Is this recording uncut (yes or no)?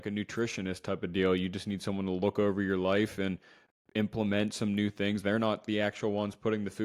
yes